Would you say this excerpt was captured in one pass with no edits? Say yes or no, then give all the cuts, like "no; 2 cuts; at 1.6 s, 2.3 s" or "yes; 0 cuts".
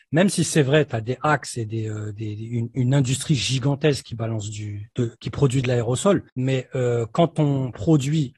no; 2 cuts; at 5.2 s, 6.3 s